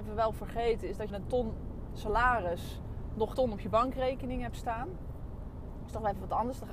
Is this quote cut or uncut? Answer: cut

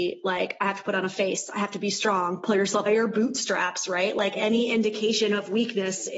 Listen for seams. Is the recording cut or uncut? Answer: cut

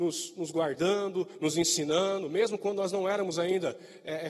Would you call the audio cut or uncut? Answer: uncut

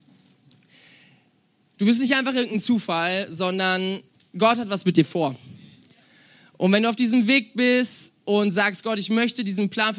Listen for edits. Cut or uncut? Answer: uncut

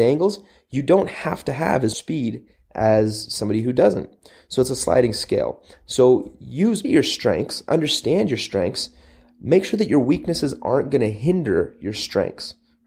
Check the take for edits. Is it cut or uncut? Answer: cut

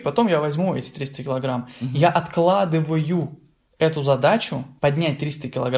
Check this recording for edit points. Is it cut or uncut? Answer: uncut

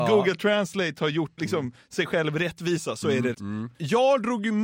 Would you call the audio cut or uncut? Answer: cut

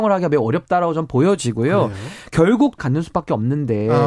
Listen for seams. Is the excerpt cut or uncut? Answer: cut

